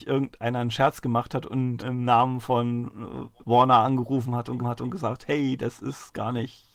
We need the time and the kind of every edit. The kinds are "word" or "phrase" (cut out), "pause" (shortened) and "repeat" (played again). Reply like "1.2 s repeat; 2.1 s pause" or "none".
1.8 s word; 3.4 s pause; 4.6 s repeat